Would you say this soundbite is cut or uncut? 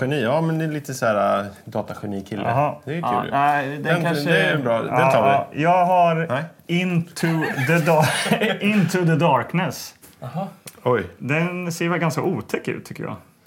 uncut